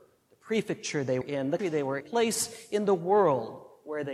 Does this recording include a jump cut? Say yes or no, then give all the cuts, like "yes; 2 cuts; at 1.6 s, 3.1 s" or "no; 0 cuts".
yes; 3 cuts; at 1.2 s, 1.6 s, 2.0 s